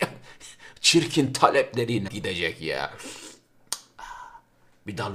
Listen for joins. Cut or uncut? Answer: cut